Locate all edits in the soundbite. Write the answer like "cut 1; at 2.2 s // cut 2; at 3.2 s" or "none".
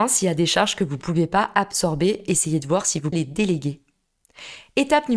cut 1; at 3.1 s